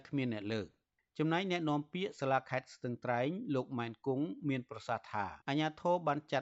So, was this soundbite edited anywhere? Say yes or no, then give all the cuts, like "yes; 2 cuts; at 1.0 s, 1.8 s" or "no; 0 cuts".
yes; 1 cut; at 5.4 s